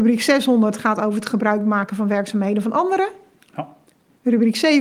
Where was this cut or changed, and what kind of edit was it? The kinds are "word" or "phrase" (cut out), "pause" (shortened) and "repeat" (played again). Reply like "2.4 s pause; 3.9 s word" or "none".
none

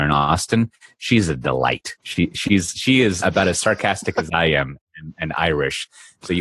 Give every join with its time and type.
2.0 s pause; 3.2 s word

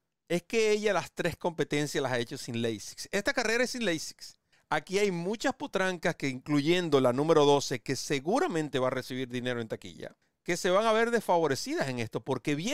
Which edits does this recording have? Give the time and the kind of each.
4.5 s pause; 10.2 s pause

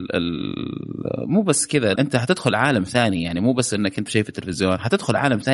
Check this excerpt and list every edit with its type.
2.0 s word; 4.1 s word

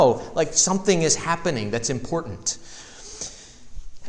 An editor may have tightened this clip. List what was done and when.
none

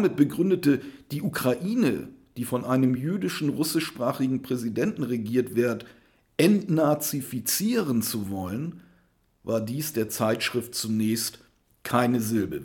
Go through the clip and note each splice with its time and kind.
none

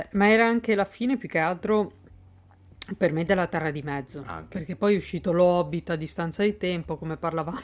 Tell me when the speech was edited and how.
none

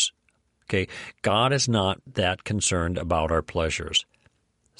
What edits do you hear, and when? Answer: none

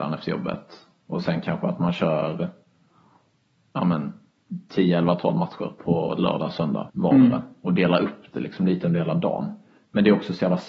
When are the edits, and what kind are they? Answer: 6.9 s pause

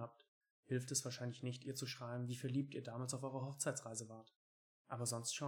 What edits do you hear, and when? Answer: none

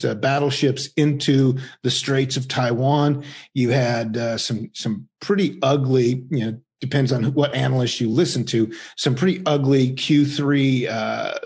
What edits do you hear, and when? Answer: none

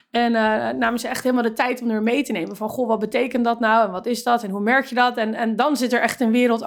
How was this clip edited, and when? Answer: none

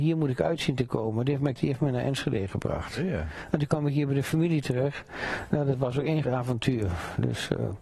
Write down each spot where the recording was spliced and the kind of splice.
1.6 s word; 6.2 s word

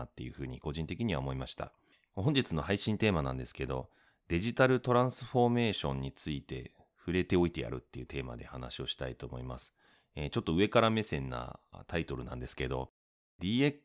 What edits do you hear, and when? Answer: none

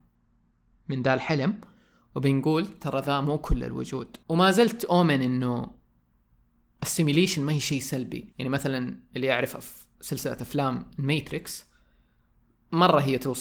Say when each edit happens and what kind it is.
4.2 s pause; 8.3 s pause

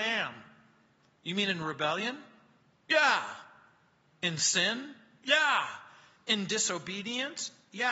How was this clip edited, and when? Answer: none

